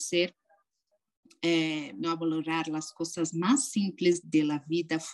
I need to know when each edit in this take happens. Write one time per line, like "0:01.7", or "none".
0:02.0
0:04.2